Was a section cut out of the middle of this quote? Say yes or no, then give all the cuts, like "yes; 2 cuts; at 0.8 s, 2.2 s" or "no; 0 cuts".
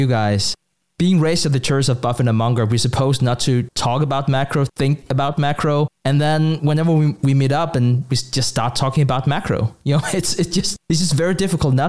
no; 0 cuts